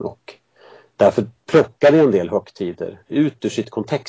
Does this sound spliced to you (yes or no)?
yes